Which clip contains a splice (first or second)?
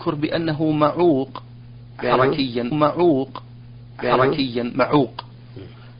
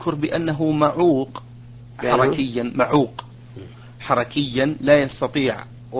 first